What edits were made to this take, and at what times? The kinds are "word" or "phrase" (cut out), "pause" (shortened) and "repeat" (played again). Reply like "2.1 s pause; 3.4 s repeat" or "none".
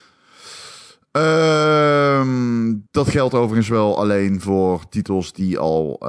2.9 s pause